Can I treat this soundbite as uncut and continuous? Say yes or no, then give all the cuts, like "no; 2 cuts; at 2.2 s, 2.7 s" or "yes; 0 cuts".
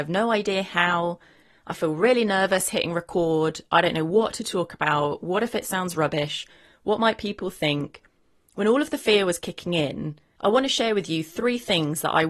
yes; 0 cuts